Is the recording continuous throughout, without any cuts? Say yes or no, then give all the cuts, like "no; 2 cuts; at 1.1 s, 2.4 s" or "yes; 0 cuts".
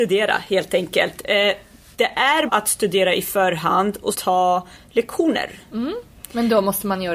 no; 2 cuts; at 2.5 s, 4.1 s